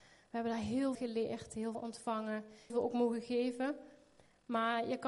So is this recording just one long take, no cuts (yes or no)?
no